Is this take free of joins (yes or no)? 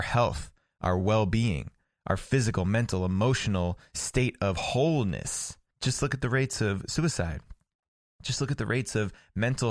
yes